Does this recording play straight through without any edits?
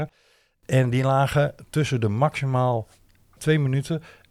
yes; 0 cuts

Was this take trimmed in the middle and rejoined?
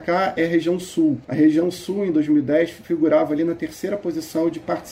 yes; 1 cut; at 1.2 s

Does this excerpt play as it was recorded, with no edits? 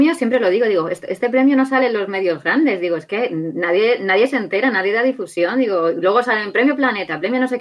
yes; 0 cuts

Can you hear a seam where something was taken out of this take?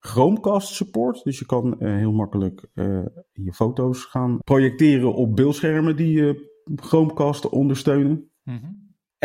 no; 0 cuts

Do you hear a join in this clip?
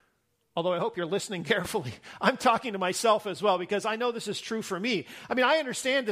no; 0 cuts

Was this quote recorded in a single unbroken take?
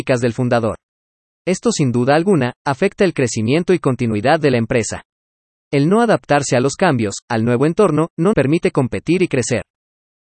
no; 1 cut; at 8.3 s

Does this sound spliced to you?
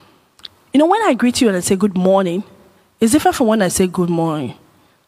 no; 0 cuts

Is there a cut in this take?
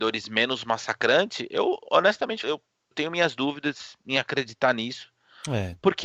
yes; 2 cuts; at 2.4 s, 2.9 s

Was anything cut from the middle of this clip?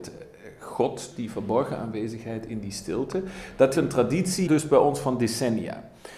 yes; 3 cuts; at 1.1 s, 3.7 s, 4.5 s

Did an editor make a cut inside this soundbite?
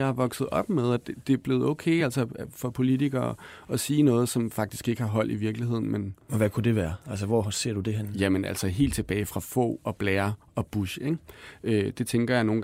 no; 0 cuts

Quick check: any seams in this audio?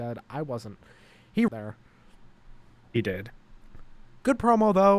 yes; 1 cut; at 1.5 s

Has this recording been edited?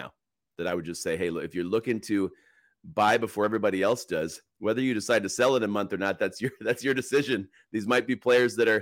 no; 0 cuts

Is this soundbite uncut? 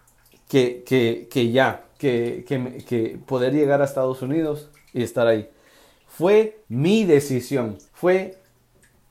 no; 2 cuts; at 6.6 s, 7.9 s

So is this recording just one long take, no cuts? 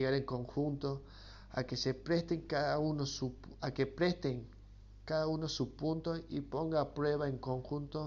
yes; 0 cuts

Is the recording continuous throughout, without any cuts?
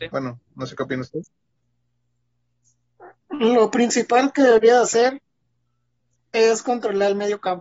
yes; 0 cuts

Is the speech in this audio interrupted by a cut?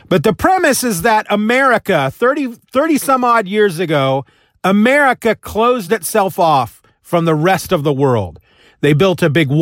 no; 0 cuts

